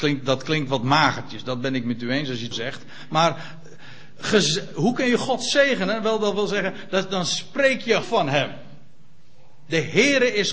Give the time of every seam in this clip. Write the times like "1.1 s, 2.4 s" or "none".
2.5 s, 8.0 s